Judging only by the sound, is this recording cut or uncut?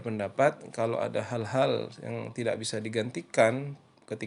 uncut